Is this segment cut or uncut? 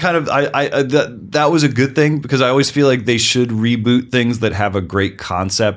uncut